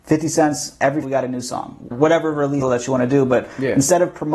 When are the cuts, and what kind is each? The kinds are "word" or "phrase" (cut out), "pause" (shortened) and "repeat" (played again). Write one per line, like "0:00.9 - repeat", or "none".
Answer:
0:01.0 - word
0:01.9 - word
0:02.6 - word